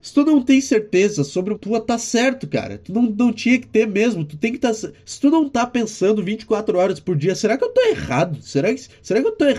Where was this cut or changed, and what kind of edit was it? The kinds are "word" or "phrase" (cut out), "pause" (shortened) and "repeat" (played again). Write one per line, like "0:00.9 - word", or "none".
0:01.5 - phrase